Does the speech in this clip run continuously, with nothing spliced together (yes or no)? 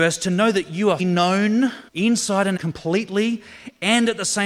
no